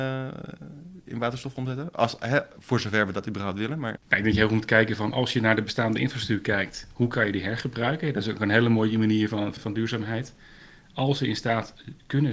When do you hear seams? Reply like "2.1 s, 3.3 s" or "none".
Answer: 4.0 s, 9.6 s